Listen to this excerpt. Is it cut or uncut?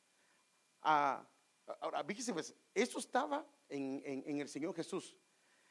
uncut